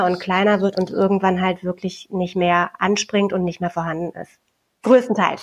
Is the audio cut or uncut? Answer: uncut